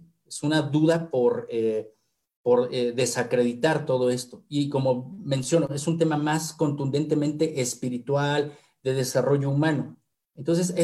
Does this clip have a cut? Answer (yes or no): no